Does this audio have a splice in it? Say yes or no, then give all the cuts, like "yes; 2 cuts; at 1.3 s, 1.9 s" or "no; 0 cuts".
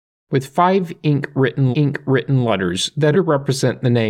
yes; 2 cuts; at 1.7 s, 3.1 s